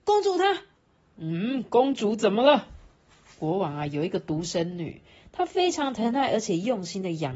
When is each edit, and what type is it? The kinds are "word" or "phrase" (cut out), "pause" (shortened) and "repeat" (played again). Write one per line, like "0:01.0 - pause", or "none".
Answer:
none